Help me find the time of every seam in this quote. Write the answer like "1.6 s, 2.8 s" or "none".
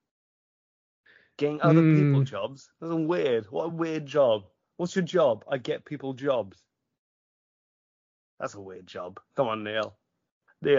none

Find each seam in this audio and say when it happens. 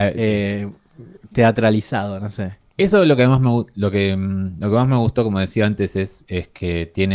1.2 s, 2.7 s

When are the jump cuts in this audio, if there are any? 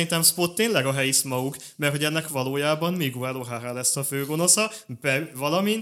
2.3 s

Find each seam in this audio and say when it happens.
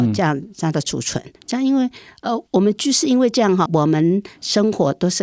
1.4 s, 2.5 s, 3.7 s

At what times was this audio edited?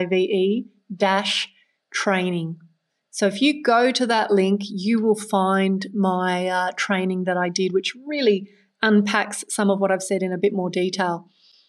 none

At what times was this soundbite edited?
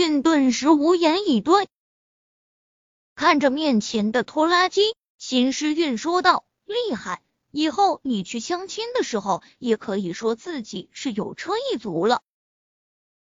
none

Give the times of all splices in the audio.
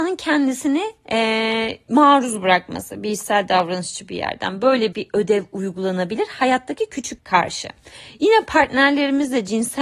4.9 s, 7.2 s

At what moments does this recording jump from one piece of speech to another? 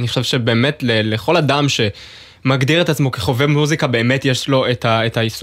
none

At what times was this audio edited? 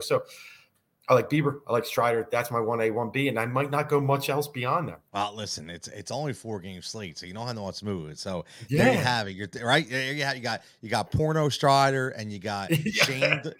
5.1 s

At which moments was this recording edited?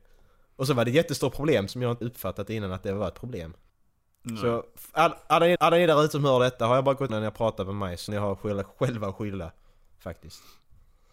1.7 s, 2.0 s, 3.7 s, 5.6 s, 7.1 s, 8.1 s

